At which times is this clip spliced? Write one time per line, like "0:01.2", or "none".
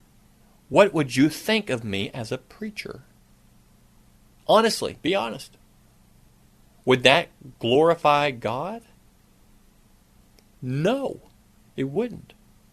none

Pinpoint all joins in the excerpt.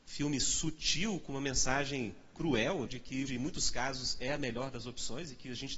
0:02.9
0:03.3

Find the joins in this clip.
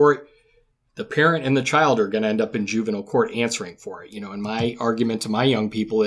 none

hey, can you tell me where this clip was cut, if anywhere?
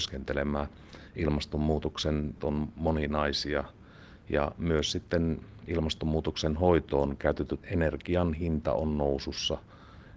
0:02.4
0:07.6

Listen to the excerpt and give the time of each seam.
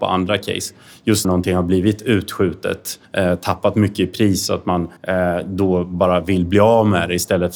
0:01.2
0:03.0
0:05.0

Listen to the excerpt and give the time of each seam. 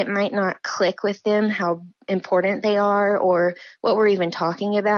none

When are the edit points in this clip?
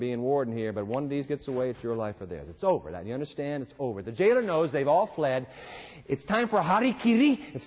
none

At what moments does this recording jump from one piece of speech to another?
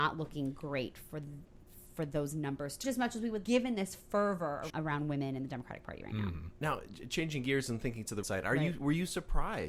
0:02.8
0:03.4
0:04.7
0:08.2

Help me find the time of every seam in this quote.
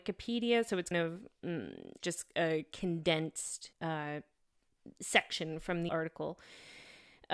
0:00.9
0:02.0
0:03.7
0:05.9

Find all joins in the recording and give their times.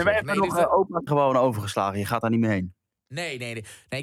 0:01.1
0:02.2

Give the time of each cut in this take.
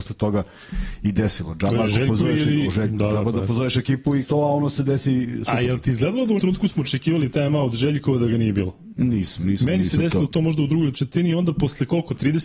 0:04.2
0:06.4
0:10.9

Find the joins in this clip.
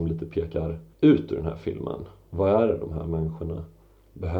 0:00.9

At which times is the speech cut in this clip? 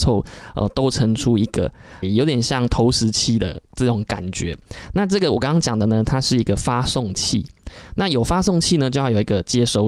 0:02.0

